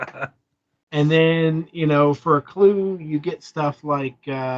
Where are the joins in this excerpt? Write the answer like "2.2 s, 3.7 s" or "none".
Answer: none